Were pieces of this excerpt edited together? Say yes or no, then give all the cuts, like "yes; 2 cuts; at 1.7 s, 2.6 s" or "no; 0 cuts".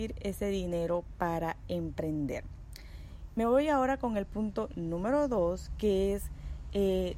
no; 0 cuts